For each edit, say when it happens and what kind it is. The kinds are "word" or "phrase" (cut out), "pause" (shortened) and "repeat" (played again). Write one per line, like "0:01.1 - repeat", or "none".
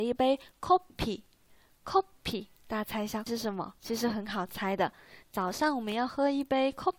0:03.3 - word
0:03.8 - pause